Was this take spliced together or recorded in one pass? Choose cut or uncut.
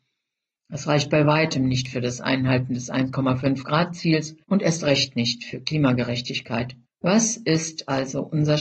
cut